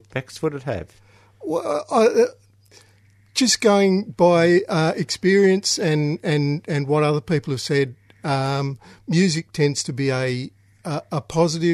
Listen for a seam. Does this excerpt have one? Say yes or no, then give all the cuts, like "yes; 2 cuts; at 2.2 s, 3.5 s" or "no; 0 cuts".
no; 0 cuts